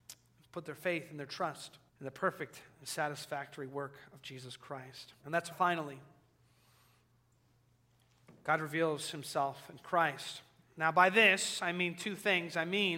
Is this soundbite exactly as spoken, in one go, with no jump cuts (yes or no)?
no